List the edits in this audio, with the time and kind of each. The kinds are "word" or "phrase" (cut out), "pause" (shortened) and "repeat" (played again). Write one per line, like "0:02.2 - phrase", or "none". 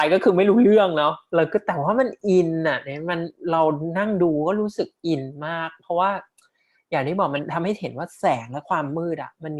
none

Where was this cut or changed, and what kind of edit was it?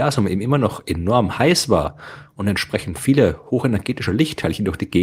none

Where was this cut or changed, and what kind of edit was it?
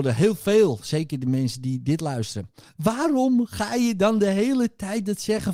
0:02.7 - pause

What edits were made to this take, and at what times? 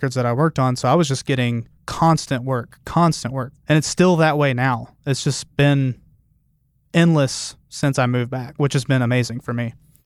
none

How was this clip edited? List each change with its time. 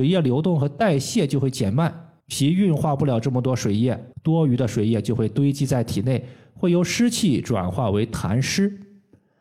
0:02.2 - pause
0:04.1 - pause

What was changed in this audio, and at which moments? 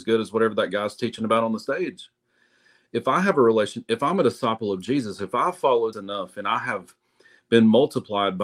0:05.9 - word

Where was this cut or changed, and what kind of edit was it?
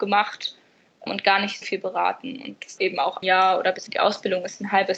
0:01.1 - word
0:01.6 - word
0:02.8 - word
0:03.2 - word
0:03.9 - word

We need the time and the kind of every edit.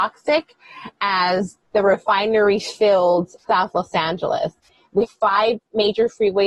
0:03.4 - word
0:05.1 - word

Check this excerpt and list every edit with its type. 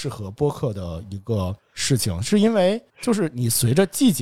0:01.6 - pause
0:02.9 - pause

